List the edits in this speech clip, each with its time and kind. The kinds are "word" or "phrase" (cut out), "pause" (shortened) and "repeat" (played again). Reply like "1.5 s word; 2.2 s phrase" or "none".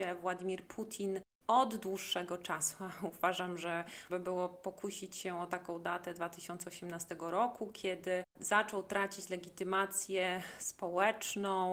4.1 s word; 8.3 s pause